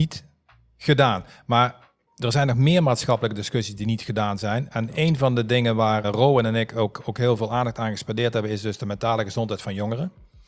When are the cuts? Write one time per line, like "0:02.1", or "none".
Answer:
0:06.0